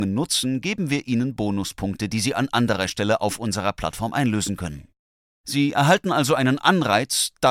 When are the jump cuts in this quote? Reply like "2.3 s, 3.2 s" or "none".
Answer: none